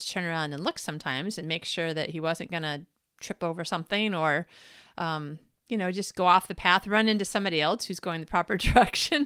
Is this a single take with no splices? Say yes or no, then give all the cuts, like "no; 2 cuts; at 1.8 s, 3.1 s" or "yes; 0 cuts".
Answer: yes; 0 cuts